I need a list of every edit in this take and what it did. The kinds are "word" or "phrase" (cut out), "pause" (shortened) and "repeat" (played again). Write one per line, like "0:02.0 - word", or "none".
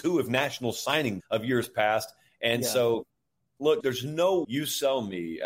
0:01.2 - word
0:03.8 - word
0:04.4 - word